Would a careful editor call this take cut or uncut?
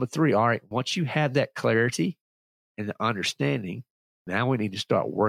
uncut